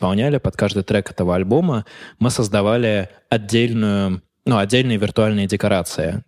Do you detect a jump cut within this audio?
no; 0 cuts

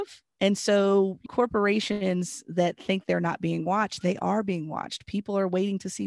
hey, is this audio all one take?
no; 1 cut; at 1.3 s

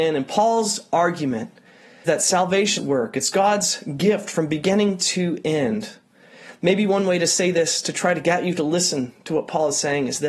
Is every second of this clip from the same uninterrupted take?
no; 2 cuts; at 2.1 s, 2.8 s

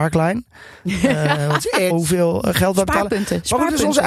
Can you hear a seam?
yes; 1 cut; at 1.9 s

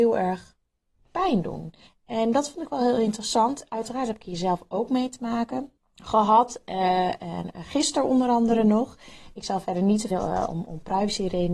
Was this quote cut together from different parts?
yes; 3 cuts; at 1.9 s, 5.8 s, 10.1 s

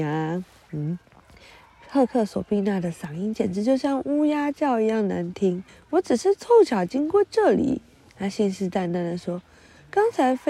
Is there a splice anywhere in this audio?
yes; 2 cuts; at 1.1 s, 5.7 s

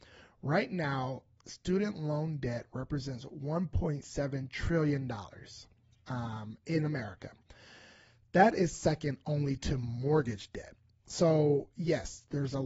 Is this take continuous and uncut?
yes; 0 cuts

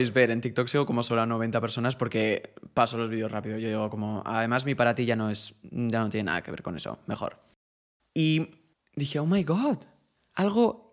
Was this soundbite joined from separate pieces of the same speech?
no; 0 cuts

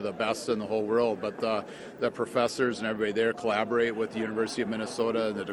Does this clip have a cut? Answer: no; 0 cuts

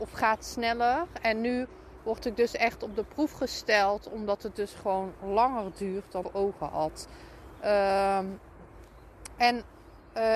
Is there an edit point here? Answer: yes; 1 cut; at 6.2 s

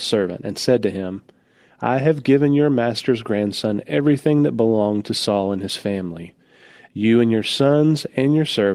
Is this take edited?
no; 0 cuts

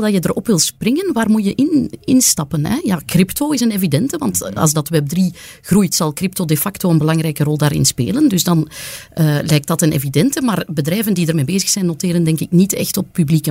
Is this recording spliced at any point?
no; 0 cuts

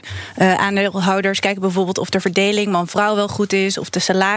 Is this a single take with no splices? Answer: yes; 0 cuts

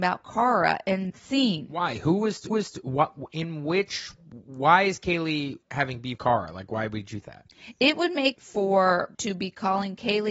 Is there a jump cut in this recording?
yes; 7 cuts; at 1.1 s, 2.5 s, 5.6 s, 6.2 s, 7.2 s, 8.3 s, 9.1 s

